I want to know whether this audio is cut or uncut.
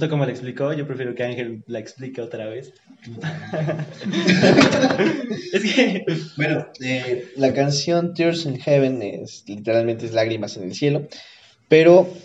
uncut